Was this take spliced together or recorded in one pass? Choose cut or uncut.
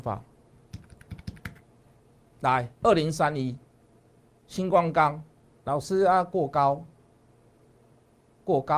cut